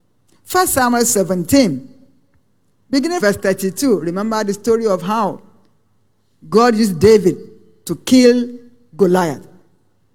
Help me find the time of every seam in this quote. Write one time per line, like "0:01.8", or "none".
0:03.2